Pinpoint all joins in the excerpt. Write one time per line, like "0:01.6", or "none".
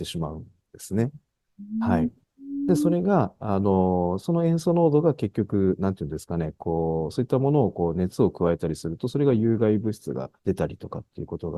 0:10.4

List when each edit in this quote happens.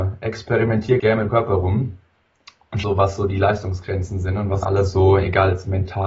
0:01.0
0:01.3
0:02.8
0:04.6

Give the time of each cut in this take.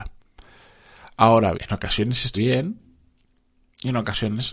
0:01.5
0:02.3

